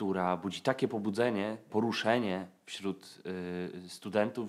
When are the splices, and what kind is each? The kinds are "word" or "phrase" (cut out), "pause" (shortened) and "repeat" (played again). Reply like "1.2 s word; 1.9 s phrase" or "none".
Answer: 1.7 s word

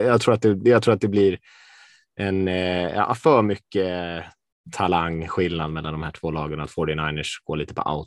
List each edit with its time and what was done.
none

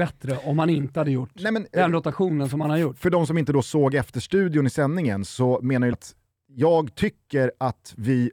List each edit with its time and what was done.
1.7 s word; 5.9 s phrase

